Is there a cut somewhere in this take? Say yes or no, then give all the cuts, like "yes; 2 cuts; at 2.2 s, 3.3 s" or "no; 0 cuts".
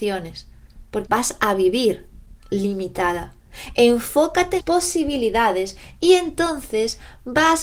yes; 3 cuts; at 1.1 s, 2.4 s, 4.6 s